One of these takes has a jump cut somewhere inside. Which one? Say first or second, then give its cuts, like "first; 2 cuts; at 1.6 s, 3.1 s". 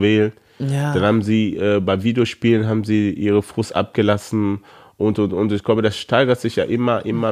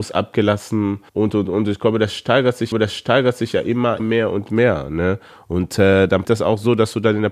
second; 4 cuts; at 1.1 s, 2.7 s, 4.0 s, 6.2 s